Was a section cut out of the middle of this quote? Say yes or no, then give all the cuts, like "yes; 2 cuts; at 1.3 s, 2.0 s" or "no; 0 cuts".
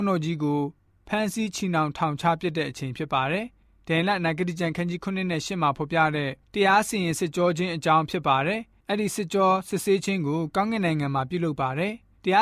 no; 0 cuts